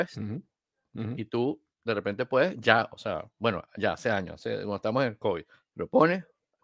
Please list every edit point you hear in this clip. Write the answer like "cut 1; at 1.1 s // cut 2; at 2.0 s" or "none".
cut 1; at 5.5 s